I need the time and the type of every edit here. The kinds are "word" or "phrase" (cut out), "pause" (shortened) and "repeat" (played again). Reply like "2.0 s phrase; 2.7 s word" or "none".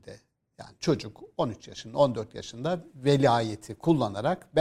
none